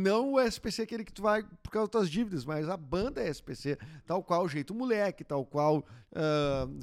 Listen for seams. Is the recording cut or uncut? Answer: uncut